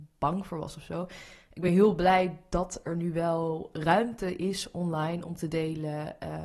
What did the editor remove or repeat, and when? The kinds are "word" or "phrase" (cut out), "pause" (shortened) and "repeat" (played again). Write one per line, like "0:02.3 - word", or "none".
none